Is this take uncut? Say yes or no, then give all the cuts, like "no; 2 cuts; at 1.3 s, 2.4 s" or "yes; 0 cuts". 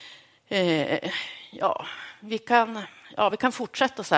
yes; 0 cuts